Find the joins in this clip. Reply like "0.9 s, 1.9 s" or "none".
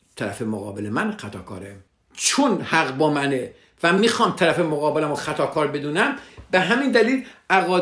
none